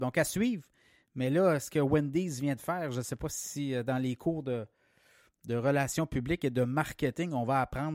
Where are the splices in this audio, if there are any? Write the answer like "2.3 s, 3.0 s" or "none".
none